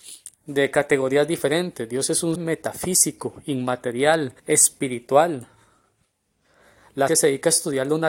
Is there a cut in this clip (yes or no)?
yes